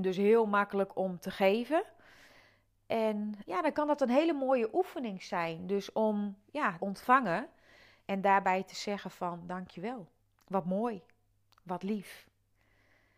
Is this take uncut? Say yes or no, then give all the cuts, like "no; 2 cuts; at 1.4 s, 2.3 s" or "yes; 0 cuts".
no; 3 cuts; at 3.4 s, 6.8 s, 10.2 s